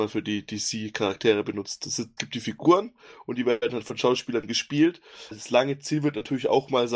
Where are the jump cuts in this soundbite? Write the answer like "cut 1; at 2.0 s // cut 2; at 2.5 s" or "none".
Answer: cut 1; at 2.2 s // cut 2; at 5.3 s